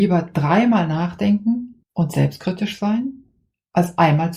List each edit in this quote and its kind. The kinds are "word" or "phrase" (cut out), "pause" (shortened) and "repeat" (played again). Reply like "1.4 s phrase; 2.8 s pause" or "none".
1.8 s pause